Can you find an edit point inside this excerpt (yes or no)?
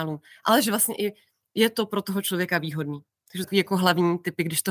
yes